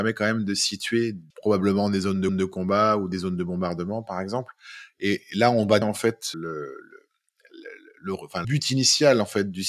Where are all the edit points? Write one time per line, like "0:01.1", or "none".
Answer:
0:01.3
0:02.3
0:05.8
0:06.3
0:08.4